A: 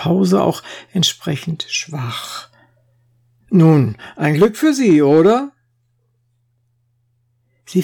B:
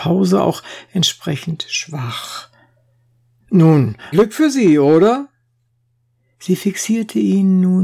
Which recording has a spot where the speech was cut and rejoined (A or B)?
B